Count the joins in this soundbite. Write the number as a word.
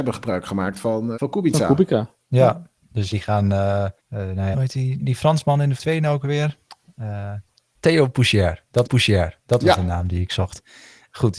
eight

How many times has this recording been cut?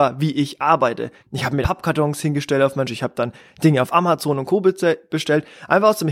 three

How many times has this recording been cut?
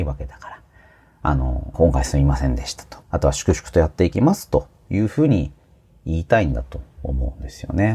two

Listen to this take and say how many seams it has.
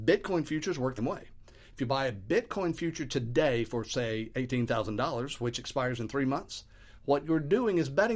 one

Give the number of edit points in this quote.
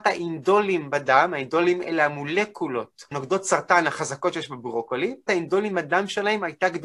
two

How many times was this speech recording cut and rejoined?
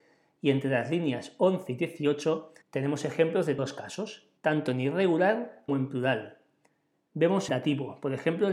five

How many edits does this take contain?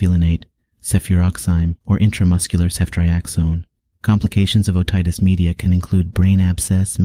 two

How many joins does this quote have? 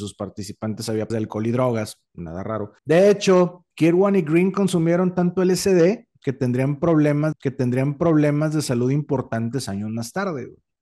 four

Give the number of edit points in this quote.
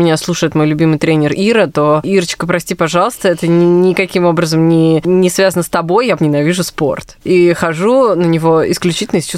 one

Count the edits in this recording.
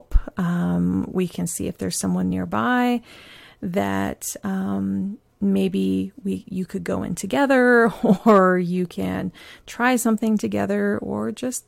zero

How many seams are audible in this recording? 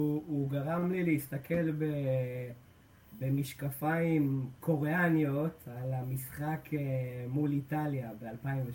zero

